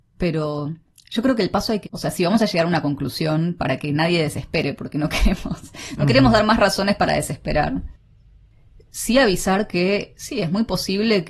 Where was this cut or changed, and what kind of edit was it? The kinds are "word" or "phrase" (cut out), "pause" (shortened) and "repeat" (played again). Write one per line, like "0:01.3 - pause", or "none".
0:01.8 - word